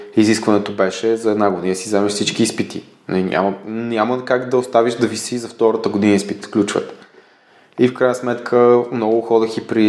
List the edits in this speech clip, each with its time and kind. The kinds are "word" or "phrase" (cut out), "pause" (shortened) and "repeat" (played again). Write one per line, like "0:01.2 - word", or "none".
0:06.4 - word